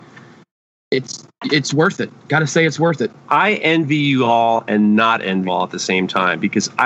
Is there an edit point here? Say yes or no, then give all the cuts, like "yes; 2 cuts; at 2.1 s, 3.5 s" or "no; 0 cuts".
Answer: yes; 2 cuts; at 3.2 s, 5.5 s